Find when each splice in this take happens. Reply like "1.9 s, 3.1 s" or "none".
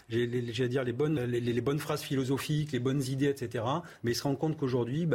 1.2 s